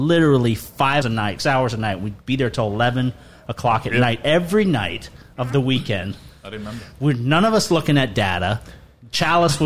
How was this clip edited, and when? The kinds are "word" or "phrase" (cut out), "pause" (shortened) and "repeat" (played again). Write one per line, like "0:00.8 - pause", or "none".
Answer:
0:01.0 - word
0:01.4 - word